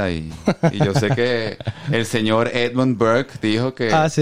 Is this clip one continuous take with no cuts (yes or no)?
yes